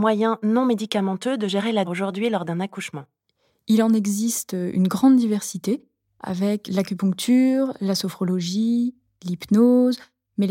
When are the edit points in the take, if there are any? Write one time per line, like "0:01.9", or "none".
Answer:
0:01.8